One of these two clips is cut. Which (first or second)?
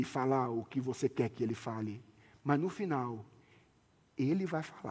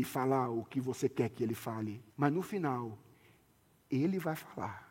second